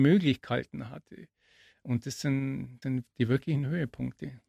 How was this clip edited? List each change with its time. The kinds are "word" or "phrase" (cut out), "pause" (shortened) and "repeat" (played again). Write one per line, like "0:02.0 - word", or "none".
0:02.8 - word